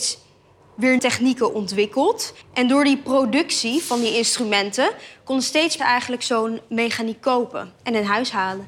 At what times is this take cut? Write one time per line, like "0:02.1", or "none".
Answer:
0:01.0
0:02.4
0:05.8
0:07.8